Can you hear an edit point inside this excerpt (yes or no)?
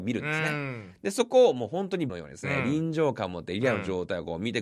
yes